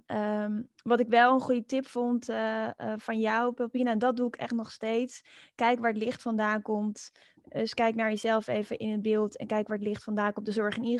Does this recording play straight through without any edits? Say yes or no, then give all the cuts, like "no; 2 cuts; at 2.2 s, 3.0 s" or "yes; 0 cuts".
yes; 0 cuts